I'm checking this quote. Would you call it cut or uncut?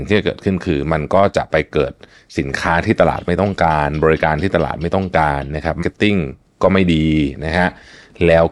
cut